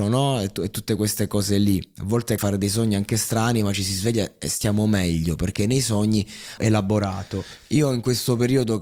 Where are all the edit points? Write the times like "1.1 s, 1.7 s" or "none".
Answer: 2.4 s, 6.6 s